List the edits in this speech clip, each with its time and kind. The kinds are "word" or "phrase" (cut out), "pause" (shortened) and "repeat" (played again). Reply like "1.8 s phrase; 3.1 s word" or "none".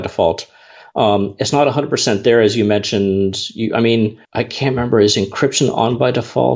4.2 s pause